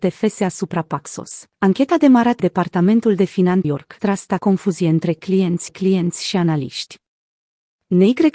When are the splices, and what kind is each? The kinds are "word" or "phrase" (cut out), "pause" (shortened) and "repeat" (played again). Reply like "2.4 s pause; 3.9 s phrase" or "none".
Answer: 1.5 s pause; 2.4 s word; 3.6 s phrase; 4.0 s phrase; 4.4 s word; 5.7 s repeat